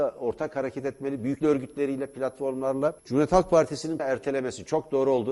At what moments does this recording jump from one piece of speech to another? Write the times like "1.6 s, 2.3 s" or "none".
1.4 s, 3.0 s, 4.0 s